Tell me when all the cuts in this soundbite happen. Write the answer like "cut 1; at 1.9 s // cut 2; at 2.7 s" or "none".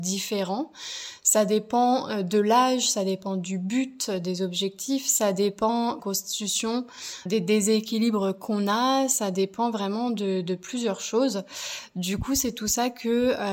cut 1; at 6.0 s // cut 2; at 7.3 s